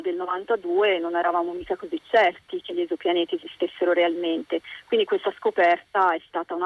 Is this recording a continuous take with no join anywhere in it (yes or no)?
yes